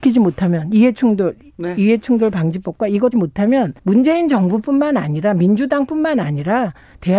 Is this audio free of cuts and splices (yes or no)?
no